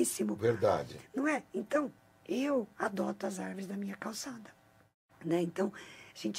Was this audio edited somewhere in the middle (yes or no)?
no